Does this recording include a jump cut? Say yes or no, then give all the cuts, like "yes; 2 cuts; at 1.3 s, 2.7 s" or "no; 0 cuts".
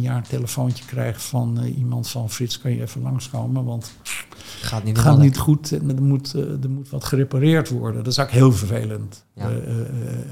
yes; 1 cut; at 5.9 s